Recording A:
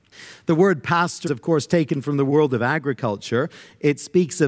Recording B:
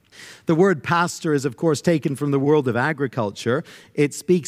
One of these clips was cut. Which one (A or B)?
A